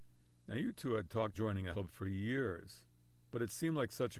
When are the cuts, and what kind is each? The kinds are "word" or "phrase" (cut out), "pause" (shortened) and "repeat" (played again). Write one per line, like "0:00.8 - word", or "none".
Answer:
0:01.3 - word
0:01.7 - word